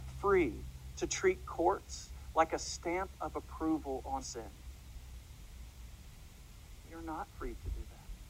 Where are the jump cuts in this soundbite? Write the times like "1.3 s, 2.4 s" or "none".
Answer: 4.2 s